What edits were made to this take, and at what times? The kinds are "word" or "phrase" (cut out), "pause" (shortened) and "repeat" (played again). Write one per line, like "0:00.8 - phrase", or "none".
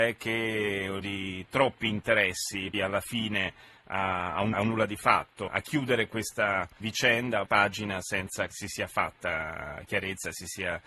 0:01.0 - word
0:02.7 - word
0:04.5 - word
0:05.5 - word
0:06.8 - word
0:07.5 - word
0:08.5 - word